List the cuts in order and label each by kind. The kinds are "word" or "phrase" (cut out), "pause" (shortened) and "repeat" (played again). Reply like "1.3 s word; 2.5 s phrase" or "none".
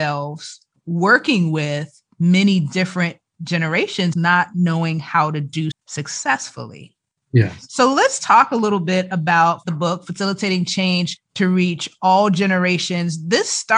4.1 s phrase; 5.7 s word